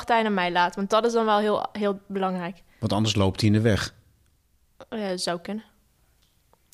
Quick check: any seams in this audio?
no; 0 cuts

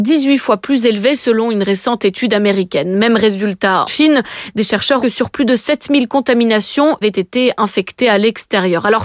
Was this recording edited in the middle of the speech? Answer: yes; 3 cuts; at 3.9 s, 5.0 s, 7.0 s

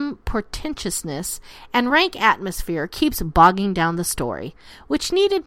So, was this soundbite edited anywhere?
no; 0 cuts

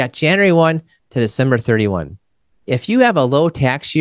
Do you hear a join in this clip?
no; 0 cuts

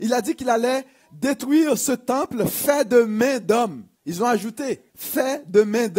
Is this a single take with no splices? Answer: no; 2 cuts; at 3.9 s, 4.9 s

